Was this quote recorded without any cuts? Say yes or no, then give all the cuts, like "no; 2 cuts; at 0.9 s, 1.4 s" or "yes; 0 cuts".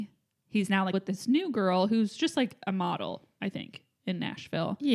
no; 1 cut; at 0.9 s